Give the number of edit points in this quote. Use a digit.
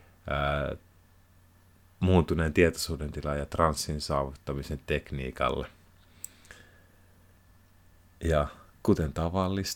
1